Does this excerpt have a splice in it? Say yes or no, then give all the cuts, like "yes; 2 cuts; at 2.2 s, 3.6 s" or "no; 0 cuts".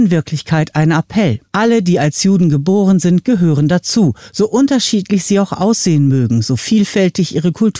yes; 1 cut; at 1.5 s